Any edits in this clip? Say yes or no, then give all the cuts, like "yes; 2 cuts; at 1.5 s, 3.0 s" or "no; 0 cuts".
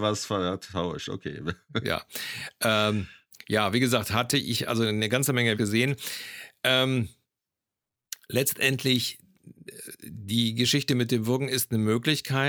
yes; 1 cut; at 5.5 s